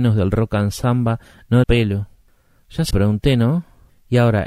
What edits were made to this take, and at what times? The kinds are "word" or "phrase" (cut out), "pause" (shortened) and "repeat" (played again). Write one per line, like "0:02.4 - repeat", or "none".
0:01.6 - phrase
0:02.9 - word